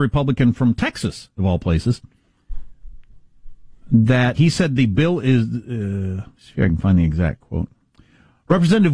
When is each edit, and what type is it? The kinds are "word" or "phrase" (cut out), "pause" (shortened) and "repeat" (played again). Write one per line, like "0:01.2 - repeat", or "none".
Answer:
0:04.3 - word